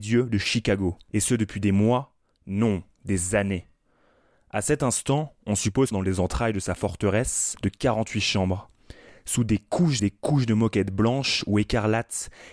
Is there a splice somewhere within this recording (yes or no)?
yes